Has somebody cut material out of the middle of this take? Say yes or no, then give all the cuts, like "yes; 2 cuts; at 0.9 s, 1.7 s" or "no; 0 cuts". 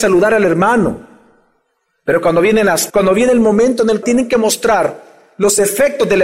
yes; 2 cuts; at 2.9 s, 4.0 s